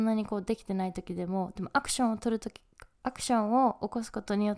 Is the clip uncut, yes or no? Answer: yes